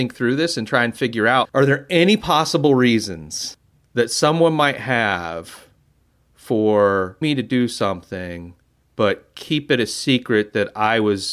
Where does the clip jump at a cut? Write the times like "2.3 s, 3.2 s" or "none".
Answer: 1.4 s, 7.2 s